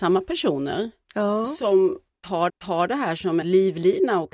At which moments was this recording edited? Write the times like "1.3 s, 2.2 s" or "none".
2.5 s, 3.4 s